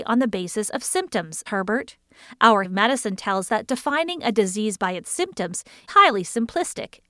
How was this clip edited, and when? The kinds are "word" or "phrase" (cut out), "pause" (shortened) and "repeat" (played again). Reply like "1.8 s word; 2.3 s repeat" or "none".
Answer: 1.5 s word; 2.6 s word; 3.5 s word; 5.9 s word